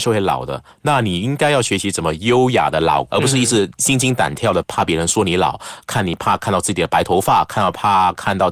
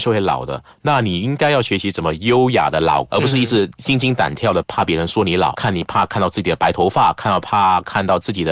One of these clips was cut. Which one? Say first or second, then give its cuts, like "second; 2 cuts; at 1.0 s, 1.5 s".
second; 1 cut; at 5.5 s